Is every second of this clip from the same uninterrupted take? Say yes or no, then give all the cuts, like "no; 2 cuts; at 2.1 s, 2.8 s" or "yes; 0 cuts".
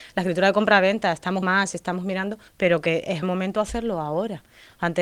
no; 3 cuts; at 1.4 s, 2.5 s, 3.2 s